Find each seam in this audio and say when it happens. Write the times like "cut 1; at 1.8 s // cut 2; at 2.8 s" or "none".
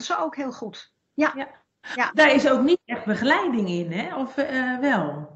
none